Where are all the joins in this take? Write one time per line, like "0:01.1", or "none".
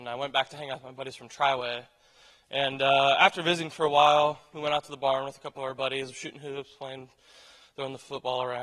none